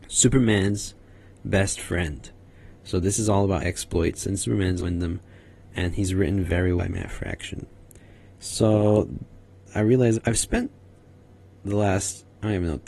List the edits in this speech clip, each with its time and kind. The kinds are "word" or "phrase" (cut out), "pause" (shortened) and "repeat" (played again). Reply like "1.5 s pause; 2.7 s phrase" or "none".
3.6 s word; 4.8 s word; 6.8 s word; 10.1 s word